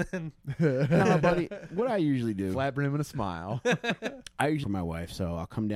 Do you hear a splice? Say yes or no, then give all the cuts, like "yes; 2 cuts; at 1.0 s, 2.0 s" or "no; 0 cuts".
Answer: yes; 1 cut; at 4.6 s